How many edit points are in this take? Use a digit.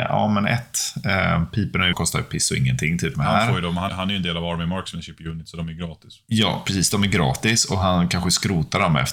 3